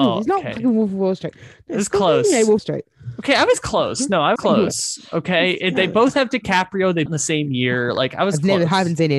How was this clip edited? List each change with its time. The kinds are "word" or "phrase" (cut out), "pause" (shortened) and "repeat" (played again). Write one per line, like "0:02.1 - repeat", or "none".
0:02.6 - word
0:04.4 - word
0:07.1 - phrase

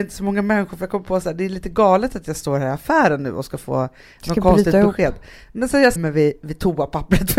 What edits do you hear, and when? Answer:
0:06.0 - word

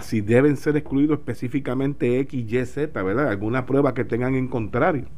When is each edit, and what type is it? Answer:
none

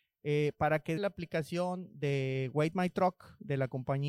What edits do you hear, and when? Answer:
0:01.0 - word

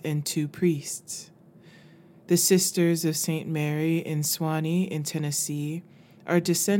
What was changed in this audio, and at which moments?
none

